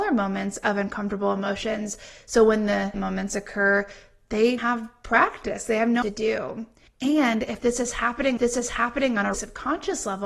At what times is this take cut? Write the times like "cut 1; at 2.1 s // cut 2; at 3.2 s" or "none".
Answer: cut 1; at 2.9 s // cut 2; at 4.6 s // cut 3; at 6.0 s // cut 4; at 6.9 s // cut 5; at 8.4 s // cut 6; at 9.3 s